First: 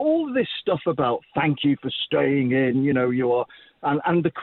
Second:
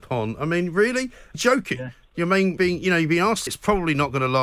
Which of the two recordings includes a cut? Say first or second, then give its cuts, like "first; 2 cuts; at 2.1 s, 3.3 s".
second; 3 cuts; at 1.3 s, 2.6 s, 3.5 s